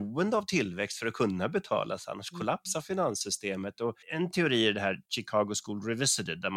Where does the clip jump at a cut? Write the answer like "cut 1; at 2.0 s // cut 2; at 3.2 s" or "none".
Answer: cut 1; at 4.0 s